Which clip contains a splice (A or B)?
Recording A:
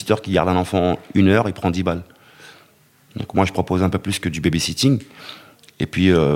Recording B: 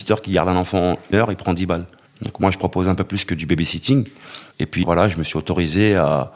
B